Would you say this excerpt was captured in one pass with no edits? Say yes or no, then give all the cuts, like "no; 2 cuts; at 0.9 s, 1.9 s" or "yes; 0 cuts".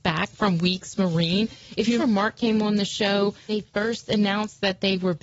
no; 2 cuts; at 2.0 s, 3.5 s